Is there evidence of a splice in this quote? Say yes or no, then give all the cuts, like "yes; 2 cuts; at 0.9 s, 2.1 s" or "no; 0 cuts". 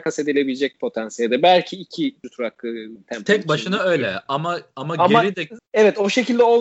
no; 0 cuts